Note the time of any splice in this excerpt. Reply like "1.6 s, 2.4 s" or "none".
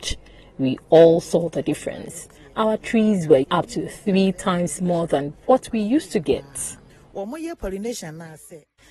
3.4 s